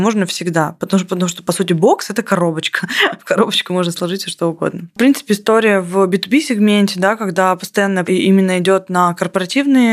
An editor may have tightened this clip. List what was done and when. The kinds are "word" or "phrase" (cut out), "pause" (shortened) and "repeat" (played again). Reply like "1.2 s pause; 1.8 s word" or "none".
8.1 s word